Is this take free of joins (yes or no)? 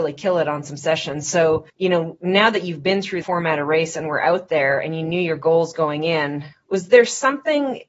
no